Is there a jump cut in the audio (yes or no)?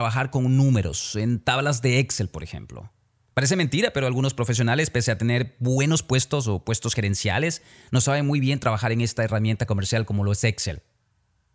no